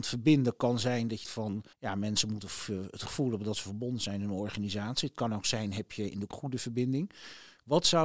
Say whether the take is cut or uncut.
cut